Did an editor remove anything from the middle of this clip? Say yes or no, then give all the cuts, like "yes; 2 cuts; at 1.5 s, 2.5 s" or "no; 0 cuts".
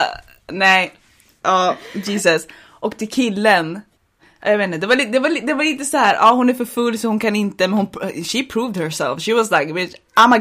no; 0 cuts